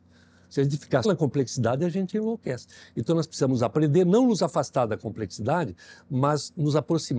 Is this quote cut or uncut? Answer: cut